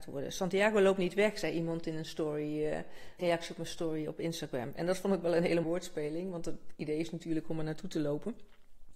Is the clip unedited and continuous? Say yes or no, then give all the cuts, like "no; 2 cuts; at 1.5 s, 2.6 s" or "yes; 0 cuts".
no; 2 cuts; at 3.2 s, 5.6 s